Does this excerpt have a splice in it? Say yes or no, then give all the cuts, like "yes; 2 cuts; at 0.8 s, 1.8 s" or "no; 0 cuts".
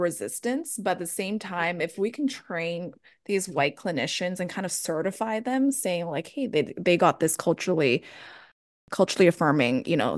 no; 0 cuts